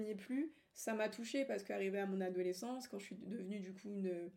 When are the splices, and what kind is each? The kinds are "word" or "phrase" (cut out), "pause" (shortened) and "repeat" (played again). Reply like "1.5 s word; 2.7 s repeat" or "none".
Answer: none